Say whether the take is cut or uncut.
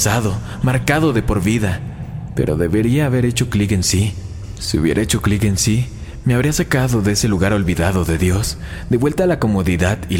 uncut